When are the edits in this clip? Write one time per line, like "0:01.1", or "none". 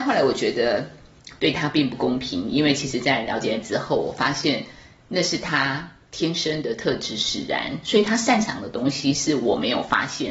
0:03.6